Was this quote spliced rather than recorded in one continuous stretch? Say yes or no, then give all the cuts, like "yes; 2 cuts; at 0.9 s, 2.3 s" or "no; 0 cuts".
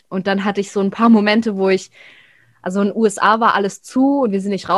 no; 0 cuts